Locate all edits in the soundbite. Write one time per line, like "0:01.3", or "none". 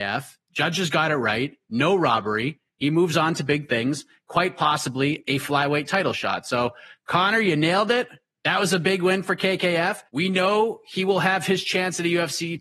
0:10.1